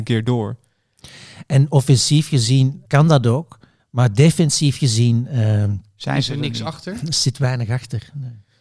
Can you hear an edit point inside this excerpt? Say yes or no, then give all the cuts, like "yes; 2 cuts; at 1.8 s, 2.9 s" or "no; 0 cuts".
yes; 2 cuts; at 2.8 s, 3.8 s